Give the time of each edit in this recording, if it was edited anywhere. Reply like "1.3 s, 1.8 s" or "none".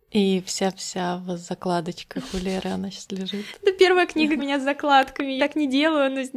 4.4 s, 5.4 s